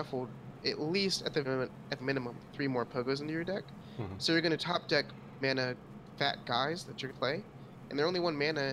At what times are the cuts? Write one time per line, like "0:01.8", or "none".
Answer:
0:01.4
0:02.0
0:05.4
0:07.1